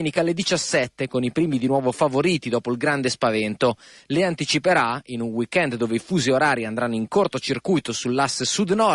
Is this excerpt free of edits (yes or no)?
yes